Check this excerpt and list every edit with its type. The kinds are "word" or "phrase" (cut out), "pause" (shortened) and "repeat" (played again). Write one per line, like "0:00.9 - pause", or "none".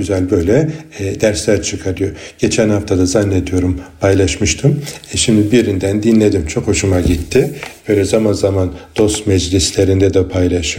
none